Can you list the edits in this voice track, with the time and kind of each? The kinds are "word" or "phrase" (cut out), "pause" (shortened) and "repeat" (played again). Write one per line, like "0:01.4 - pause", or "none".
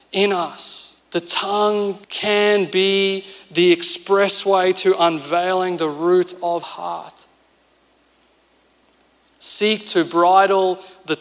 0:01.0 - pause
0:02.0 - pause
0:06.6 - word